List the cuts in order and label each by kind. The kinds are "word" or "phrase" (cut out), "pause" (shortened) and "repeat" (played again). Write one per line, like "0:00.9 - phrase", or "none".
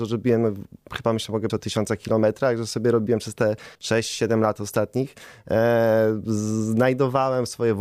0:01.5 - word
0:03.7 - pause